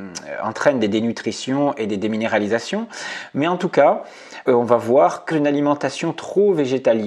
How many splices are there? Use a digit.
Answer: 2